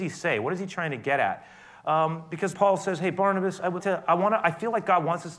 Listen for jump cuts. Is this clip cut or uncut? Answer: cut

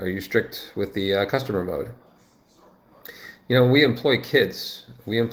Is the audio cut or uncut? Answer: uncut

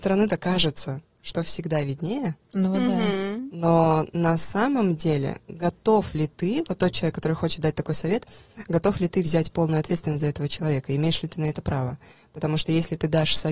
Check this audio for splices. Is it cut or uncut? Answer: uncut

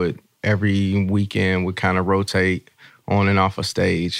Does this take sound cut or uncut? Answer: uncut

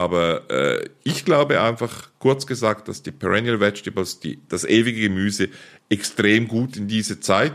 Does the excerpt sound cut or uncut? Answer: uncut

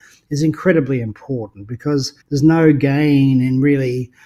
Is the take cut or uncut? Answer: cut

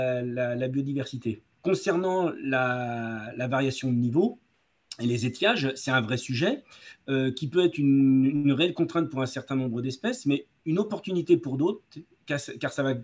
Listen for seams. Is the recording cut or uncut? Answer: cut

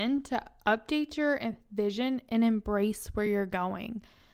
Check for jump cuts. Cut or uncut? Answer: uncut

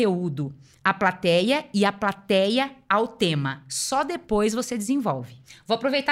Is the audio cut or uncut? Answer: uncut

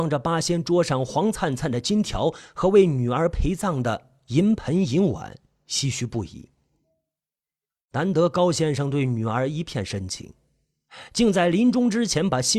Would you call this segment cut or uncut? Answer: uncut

